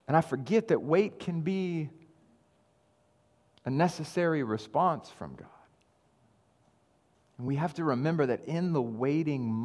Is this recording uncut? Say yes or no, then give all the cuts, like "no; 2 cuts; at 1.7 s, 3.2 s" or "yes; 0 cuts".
yes; 0 cuts